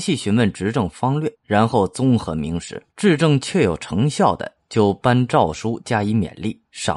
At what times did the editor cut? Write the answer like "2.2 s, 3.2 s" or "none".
1.3 s, 2.9 s